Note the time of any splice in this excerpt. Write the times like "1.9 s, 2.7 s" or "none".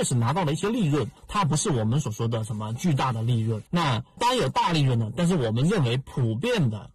1.2 s, 3.7 s, 4.2 s